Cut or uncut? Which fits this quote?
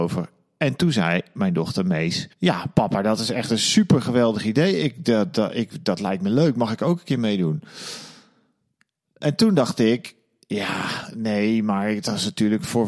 cut